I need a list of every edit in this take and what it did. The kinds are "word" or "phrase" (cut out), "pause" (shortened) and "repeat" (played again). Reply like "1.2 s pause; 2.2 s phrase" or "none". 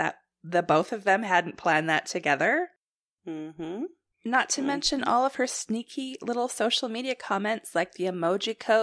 none